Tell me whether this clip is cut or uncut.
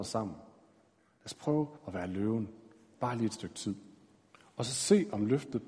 cut